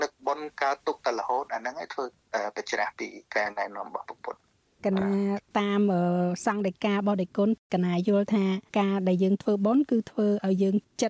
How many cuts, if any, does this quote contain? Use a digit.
1